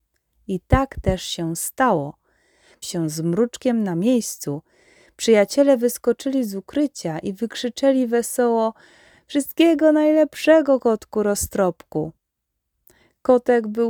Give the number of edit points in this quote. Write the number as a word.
one